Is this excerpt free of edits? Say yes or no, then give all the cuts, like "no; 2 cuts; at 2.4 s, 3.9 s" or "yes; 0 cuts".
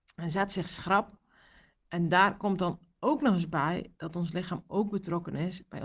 yes; 0 cuts